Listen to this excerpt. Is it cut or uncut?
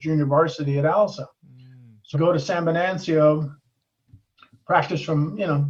cut